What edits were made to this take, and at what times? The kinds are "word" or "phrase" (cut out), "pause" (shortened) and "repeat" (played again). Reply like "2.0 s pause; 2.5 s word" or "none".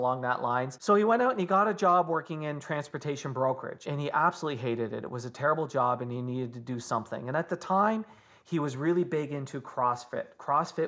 none